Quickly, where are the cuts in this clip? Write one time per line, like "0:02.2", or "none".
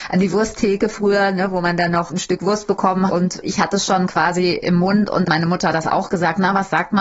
0:03.1
0:03.4
0:05.2